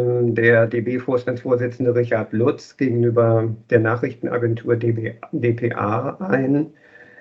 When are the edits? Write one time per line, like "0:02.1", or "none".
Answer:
none